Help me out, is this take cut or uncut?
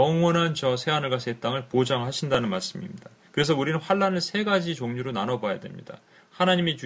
cut